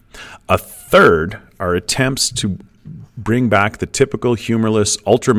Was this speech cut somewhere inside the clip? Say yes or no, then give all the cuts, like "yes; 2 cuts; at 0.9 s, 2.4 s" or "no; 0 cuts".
no; 0 cuts